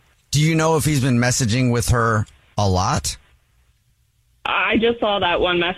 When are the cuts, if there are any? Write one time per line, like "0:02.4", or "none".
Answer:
none